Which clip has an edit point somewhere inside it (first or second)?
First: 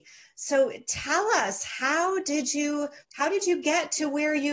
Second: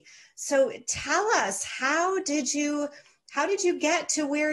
first